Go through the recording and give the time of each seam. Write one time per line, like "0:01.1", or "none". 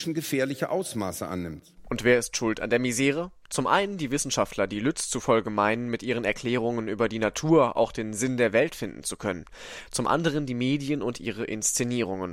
none